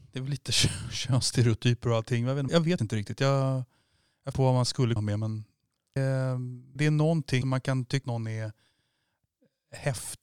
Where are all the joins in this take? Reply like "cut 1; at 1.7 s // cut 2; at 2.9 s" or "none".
cut 1; at 2.5 s // cut 2; at 2.8 s // cut 3; at 4.3 s // cut 4; at 5.0 s // cut 5; at 6.0 s // cut 6; at 6.8 s // cut 7; at 7.4 s // cut 8; at 8.0 s